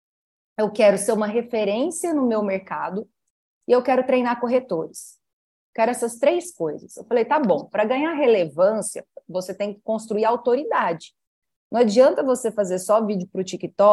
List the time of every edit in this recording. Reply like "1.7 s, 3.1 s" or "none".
none